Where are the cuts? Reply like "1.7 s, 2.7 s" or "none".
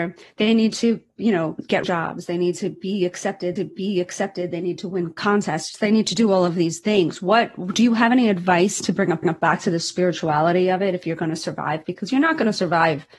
1.8 s, 3.6 s, 9.2 s